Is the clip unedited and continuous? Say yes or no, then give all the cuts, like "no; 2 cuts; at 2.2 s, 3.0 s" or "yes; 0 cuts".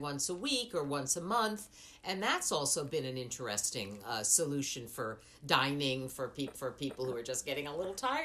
no; 1 cut; at 6.5 s